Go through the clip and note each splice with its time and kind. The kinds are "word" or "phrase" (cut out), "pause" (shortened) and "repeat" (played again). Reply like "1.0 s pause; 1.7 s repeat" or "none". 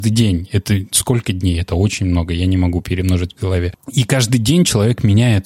none